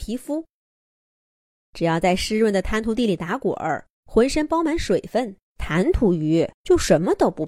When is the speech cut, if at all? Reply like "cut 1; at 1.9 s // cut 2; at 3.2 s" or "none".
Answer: cut 1; at 3.9 s // cut 2; at 5.5 s // cut 3; at 6.5 s

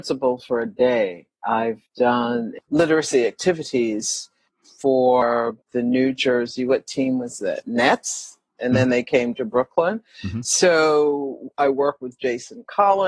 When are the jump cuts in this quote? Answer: cut 1; at 1.9 s // cut 2; at 5.6 s

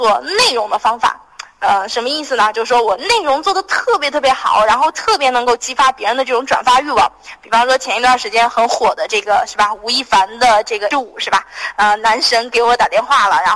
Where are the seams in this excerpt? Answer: cut 1; at 10.9 s

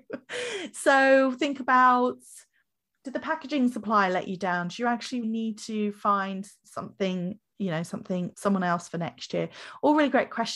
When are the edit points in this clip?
cut 1; at 5.2 s // cut 2; at 8.3 s

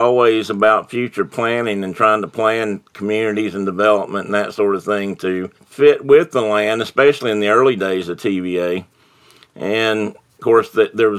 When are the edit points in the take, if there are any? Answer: cut 1; at 5.6 s

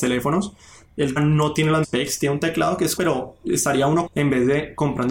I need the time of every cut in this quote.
cut 1; at 1.2 s // cut 2; at 1.8 s // cut 3; at 3.0 s // cut 4; at 4.1 s

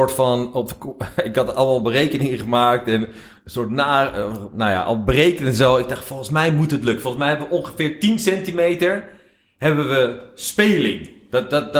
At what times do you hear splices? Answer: none

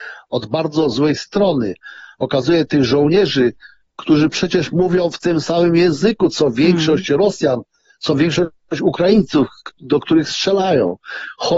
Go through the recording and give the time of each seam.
none

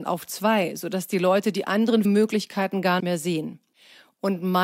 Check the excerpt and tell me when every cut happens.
cut 1; at 2.0 s // cut 2; at 3.0 s

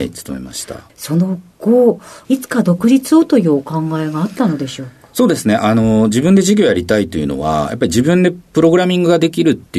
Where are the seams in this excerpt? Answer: none

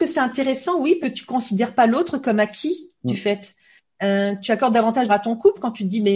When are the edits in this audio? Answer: cut 1; at 1.0 s // cut 2; at 5.1 s

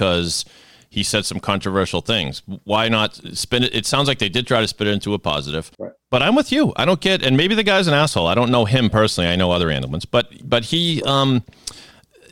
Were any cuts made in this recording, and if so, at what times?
cut 1; at 5.7 s

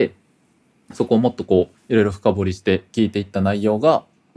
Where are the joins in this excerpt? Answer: cut 1; at 1.8 s

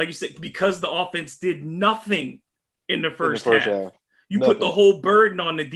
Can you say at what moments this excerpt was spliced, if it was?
none

